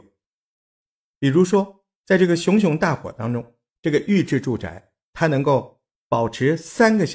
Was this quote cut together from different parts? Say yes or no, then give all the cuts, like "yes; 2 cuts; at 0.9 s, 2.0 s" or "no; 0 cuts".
no; 0 cuts